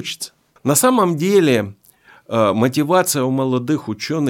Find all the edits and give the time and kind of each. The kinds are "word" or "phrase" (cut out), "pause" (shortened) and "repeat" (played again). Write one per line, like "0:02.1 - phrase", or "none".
none

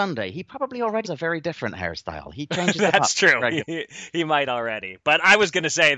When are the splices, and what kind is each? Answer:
0:01.0 - word

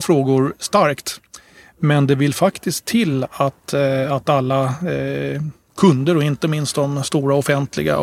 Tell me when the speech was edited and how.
none

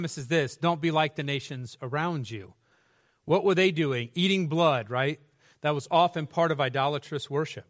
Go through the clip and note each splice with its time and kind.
none

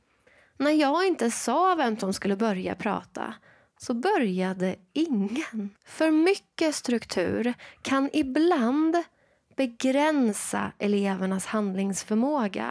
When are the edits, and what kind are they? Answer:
0:05.8 - pause

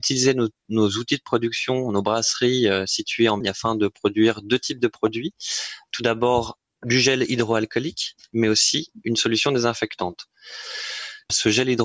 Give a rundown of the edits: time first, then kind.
0:03.4 - phrase

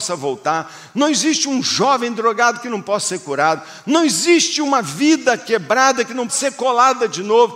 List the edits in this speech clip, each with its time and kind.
0:06.3 - word

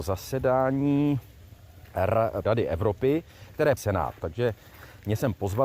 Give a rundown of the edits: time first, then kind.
0:02.4 - phrase
0:03.8 - phrase

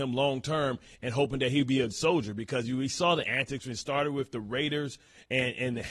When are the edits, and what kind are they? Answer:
0:01.9 - word

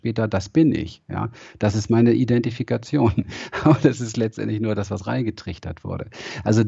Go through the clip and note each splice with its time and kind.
none

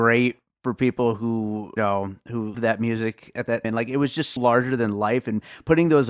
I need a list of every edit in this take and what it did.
0:01.8 - word
0:02.5 - word
0:03.6 - word
0:04.4 - word

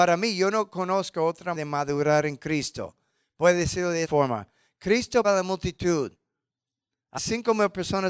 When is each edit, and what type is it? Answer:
0:01.5 - word
0:04.0 - word
0:05.2 - word
0:07.2 - word

